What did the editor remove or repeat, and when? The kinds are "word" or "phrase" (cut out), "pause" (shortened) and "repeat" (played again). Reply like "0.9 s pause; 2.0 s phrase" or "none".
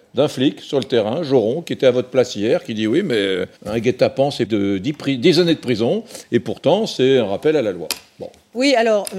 3.6 s pause; 4.5 s word